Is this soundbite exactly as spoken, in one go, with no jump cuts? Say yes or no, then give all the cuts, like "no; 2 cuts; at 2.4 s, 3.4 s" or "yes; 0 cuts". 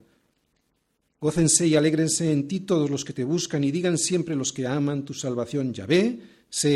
yes; 0 cuts